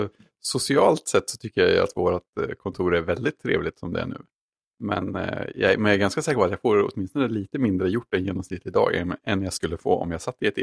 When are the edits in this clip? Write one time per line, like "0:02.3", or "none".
none